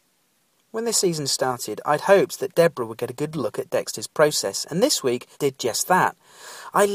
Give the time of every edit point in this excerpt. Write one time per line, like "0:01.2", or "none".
0:05.3